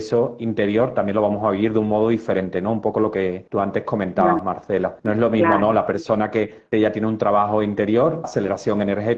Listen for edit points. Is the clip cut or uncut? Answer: cut